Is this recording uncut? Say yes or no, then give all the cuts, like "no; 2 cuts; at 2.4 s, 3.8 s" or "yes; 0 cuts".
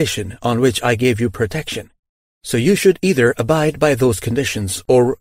yes; 0 cuts